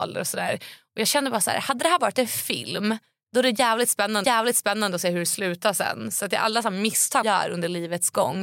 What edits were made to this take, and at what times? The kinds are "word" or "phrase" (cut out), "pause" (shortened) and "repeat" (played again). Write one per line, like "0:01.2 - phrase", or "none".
0:04.2 - repeat
0:07.2 - word